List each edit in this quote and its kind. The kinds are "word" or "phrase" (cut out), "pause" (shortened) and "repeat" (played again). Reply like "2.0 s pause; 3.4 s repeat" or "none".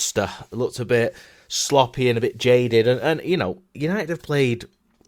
none